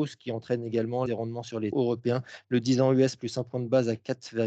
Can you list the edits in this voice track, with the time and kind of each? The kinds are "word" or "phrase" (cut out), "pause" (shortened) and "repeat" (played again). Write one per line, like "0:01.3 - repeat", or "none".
0:01.1 - phrase
0:01.7 - word